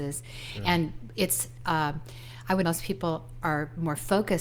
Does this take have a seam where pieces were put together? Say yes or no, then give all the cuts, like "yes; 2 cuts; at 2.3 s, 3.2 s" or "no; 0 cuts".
yes; 2 cuts; at 1.1 s, 2.6 s